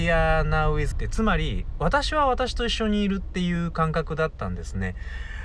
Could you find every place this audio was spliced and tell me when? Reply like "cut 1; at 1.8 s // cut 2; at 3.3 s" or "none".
cut 1; at 0.9 s